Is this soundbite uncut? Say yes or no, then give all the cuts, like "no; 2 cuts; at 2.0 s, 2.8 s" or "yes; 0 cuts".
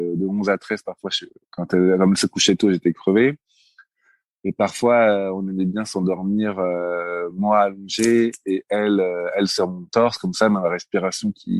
yes; 0 cuts